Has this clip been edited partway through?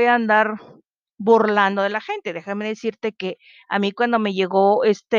no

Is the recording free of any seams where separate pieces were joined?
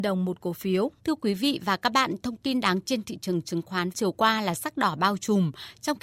no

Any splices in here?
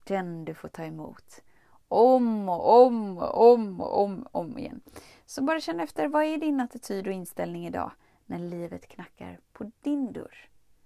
no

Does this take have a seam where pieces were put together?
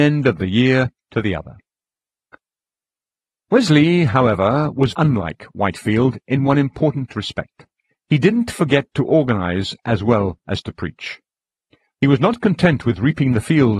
yes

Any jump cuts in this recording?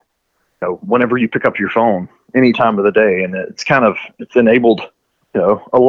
no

